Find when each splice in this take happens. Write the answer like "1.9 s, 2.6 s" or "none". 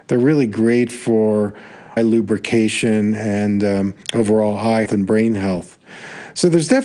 2.0 s, 4.0 s, 4.9 s